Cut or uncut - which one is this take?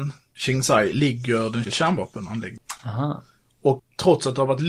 cut